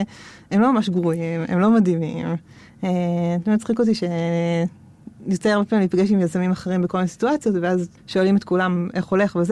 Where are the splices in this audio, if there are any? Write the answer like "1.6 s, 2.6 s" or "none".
8.0 s

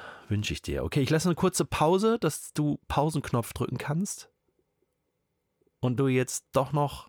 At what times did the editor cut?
6.0 s

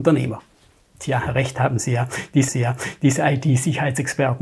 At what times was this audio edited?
2.5 s

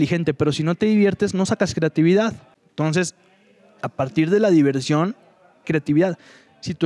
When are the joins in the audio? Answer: 5.6 s

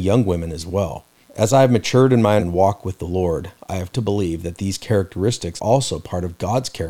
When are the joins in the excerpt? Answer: 1.2 s, 2.4 s, 3.9 s, 5.6 s

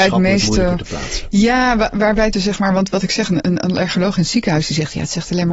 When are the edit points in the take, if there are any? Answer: 2.3 s, 3.4 s

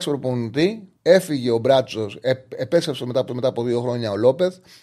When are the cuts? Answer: 1.0 s, 3.3 s

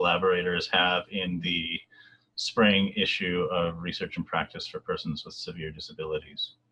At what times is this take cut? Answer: none

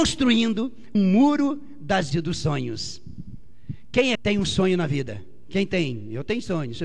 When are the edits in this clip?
0.9 s, 2.1 s, 4.1 s

